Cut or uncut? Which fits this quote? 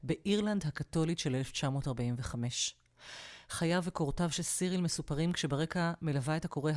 uncut